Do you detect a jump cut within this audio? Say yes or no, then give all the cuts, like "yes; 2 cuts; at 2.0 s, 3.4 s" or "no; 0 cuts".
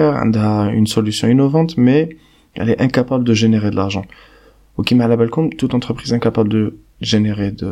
no; 0 cuts